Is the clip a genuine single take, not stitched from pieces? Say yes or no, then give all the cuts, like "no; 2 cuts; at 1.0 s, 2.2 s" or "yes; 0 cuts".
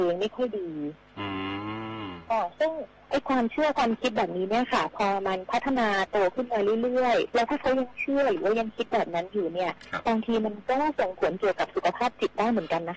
no; 1 cut; at 7.3 s